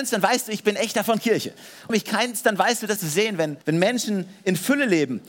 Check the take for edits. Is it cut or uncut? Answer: cut